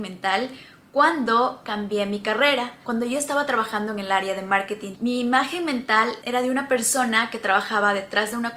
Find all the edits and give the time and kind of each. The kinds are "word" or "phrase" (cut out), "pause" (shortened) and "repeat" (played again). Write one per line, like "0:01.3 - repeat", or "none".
0:04.9 - word